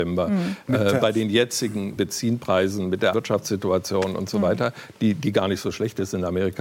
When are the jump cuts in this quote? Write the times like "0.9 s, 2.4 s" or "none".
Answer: 2.0 s, 3.1 s